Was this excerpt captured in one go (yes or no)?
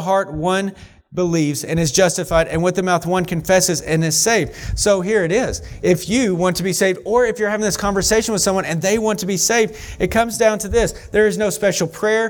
no